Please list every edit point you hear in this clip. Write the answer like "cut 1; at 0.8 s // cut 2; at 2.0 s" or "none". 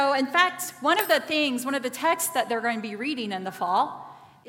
none